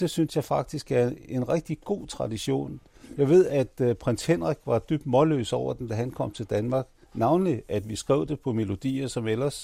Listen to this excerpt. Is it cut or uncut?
cut